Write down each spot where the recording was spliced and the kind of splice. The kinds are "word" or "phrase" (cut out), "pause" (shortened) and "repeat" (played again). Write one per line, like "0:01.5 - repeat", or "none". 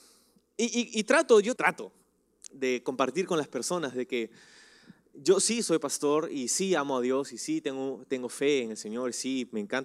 0:01.6 - word
0:02.5 - word